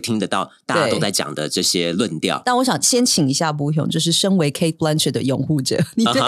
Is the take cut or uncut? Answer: uncut